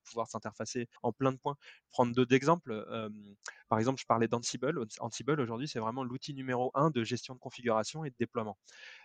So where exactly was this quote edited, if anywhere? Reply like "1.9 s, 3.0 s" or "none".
1.0 s